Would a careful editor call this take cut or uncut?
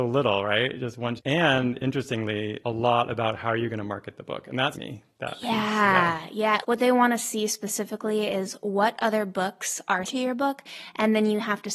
cut